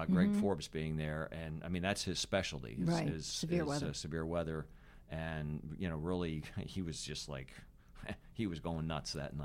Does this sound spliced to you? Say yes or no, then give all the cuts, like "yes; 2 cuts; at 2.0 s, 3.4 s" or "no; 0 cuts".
no; 0 cuts